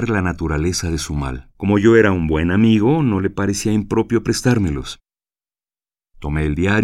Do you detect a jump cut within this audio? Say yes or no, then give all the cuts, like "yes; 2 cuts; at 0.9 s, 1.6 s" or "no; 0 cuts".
yes; 1 cut; at 1.5 s